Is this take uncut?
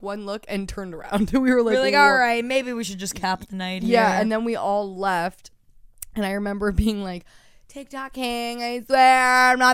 yes; 0 cuts

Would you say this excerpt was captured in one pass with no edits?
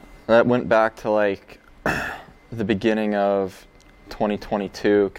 yes; 0 cuts

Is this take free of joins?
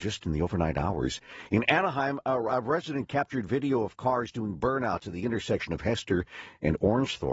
yes; 0 cuts

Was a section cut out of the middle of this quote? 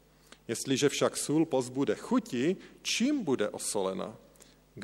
no; 0 cuts

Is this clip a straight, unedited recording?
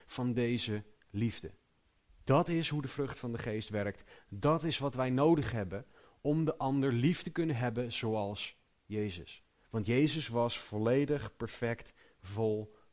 yes; 0 cuts

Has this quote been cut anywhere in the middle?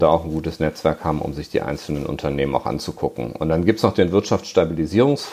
no; 0 cuts

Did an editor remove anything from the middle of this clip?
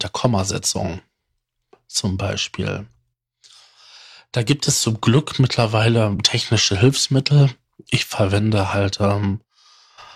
no; 0 cuts

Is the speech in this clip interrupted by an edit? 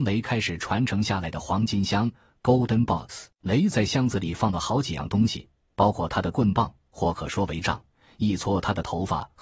yes; 1 cut; at 3.3 s

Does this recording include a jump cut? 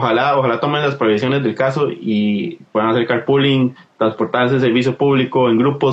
no; 0 cuts

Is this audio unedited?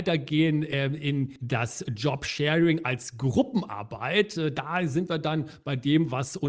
yes; 0 cuts

